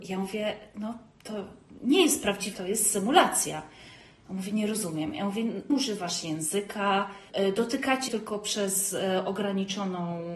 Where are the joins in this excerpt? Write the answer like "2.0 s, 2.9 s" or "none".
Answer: 2.5 s, 5.7 s, 7.3 s, 8.1 s